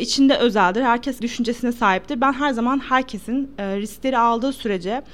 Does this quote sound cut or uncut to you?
cut